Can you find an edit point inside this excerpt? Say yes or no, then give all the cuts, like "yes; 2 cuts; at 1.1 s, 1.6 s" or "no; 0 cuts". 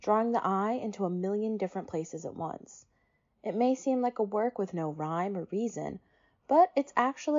no; 0 cuts